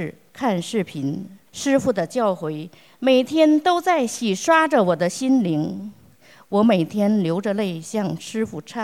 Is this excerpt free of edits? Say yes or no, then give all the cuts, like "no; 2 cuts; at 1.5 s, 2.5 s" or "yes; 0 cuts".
no; 1 cut; at 1.5 s